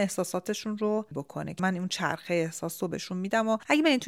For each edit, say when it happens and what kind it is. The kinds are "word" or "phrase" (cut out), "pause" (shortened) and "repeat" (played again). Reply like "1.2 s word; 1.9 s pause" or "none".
1.1 s word; 1.6 s word